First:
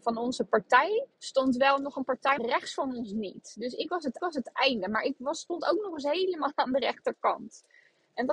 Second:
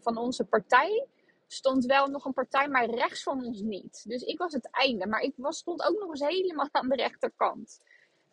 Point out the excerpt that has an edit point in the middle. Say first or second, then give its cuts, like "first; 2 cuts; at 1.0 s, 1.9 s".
first; 3 cuts; at 1.1 s, 2.4 s, 4.2 s